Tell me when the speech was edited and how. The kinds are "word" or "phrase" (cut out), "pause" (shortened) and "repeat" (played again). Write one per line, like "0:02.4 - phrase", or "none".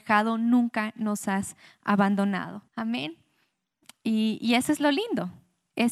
0:02.7 - pause